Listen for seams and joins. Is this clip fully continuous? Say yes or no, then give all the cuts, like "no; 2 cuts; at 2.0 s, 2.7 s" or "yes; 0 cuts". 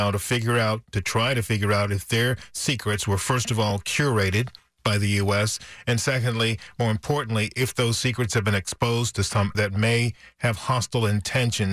no; 1 cut; at 9.5 s